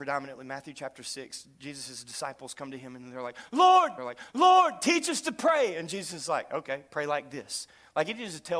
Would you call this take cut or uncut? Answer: cut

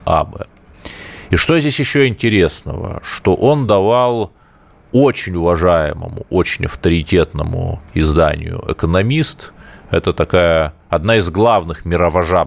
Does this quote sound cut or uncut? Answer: uncut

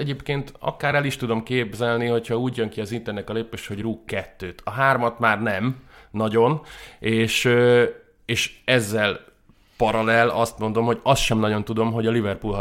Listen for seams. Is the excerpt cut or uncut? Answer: uncut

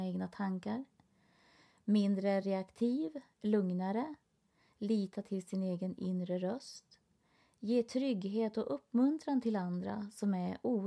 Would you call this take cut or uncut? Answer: uncut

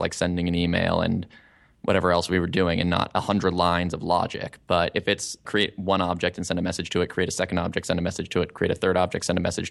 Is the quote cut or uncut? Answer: uncut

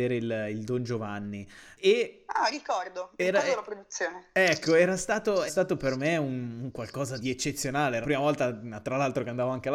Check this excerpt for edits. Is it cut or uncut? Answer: cut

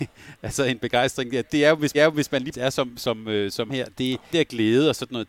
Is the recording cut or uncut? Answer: cut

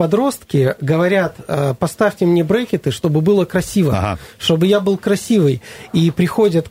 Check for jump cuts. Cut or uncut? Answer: uncut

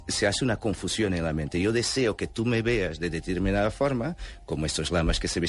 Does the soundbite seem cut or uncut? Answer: uncut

